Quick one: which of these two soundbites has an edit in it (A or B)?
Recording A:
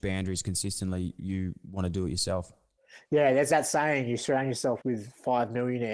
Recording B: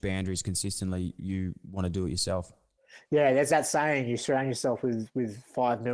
A